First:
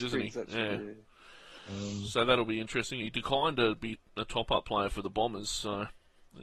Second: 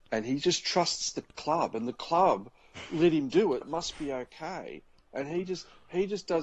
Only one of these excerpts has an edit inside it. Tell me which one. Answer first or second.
second